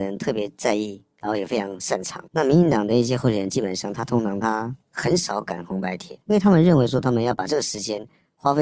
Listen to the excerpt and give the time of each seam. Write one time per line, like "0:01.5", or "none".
0:02.3
0:06.2